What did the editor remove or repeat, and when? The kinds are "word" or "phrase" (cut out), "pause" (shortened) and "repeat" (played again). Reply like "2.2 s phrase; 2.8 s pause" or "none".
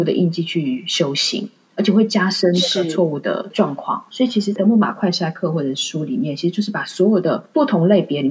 4.1 s pause